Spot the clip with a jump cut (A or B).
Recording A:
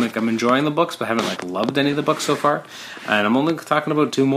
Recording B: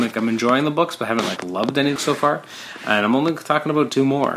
B